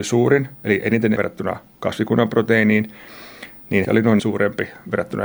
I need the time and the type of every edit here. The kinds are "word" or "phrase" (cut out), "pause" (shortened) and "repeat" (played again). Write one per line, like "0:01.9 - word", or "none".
0:01.2 - word
0:03.8 - phrase
0:04.2 - word